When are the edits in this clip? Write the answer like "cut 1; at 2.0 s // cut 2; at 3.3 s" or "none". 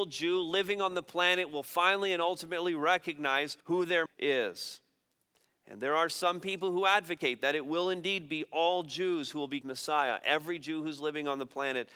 cut 1; at 3.6 s // cut 2; at 4.1 s // cut 3; at 9.6 s